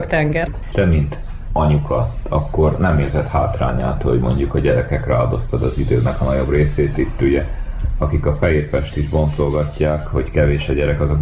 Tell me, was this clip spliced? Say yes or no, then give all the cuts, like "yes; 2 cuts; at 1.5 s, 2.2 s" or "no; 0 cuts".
no; 0 cuts